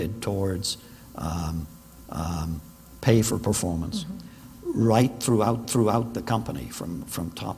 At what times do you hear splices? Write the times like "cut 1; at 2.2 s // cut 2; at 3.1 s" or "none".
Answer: cut 1; at 2.1 s // cut 2; at 5.6 s